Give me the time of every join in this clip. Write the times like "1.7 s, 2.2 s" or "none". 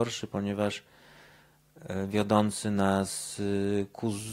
none